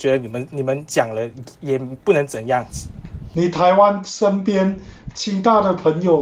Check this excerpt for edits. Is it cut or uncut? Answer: uncut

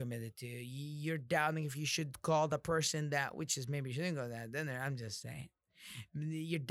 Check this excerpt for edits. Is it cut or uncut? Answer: uncut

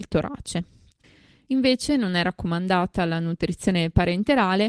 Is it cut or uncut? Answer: uncut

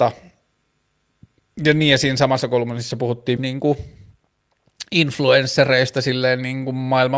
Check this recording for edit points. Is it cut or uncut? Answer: cut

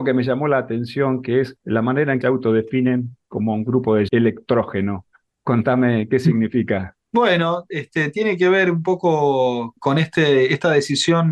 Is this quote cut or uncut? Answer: cut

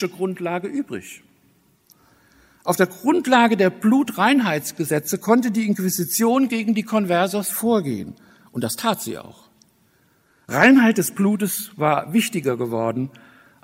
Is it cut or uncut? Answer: uncut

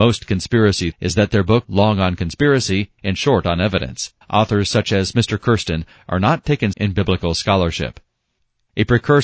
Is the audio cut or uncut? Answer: cut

